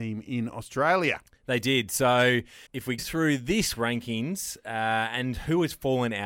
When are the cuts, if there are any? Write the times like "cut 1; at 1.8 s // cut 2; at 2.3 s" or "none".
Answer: cut 1; at 2.7 s // cut 2; at 3.0 s // cut 3; at 3.8 s